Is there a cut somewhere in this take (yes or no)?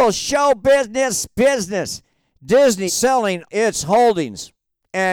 yes